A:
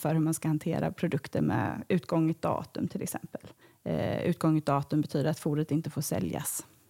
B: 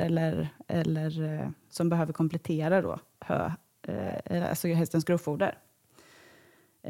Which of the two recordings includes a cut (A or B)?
A